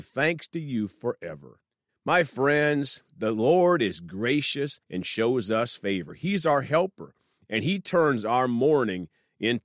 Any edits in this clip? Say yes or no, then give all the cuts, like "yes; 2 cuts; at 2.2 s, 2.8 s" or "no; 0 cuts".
yes; 3 cuts; at 1.9 s, 3.1 s, 4.8 s